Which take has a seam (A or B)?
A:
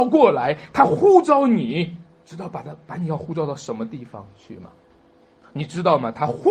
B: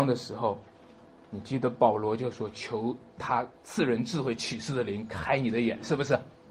B